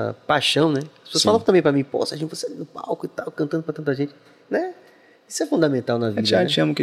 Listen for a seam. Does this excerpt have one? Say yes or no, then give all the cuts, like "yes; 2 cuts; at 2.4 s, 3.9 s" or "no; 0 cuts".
no; 0 cuts